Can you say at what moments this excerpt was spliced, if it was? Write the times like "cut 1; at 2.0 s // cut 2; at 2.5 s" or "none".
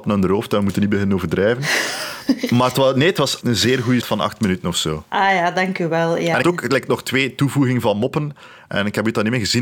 cut 1; at 3.4 s // cut 2; at 4.0 s // cut 3; at 6.4 s

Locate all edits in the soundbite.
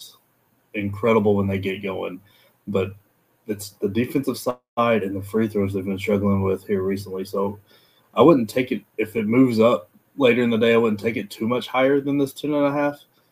none

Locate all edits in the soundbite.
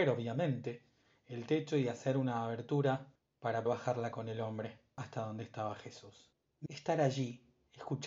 cut 1; at 3.7 s // cut 2; at 4.1 s // cut 3; at 6.7 s

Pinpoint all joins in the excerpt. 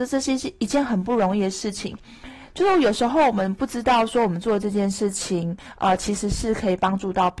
none

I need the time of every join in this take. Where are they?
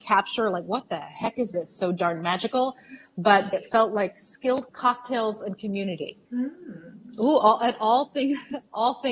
cut 1; at 1.5 s // cut 2; at 3.5 s // cut 3; at 4.7 s // cut 4; at 6.2 s

